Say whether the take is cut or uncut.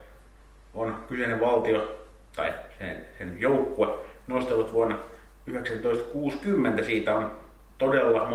uncut